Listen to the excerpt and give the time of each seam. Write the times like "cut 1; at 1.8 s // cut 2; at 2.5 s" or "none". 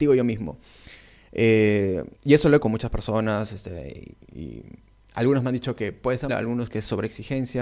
cut 1; at 2.1 s // cut 2; at 2.6 s // cut 3; at 6.3 s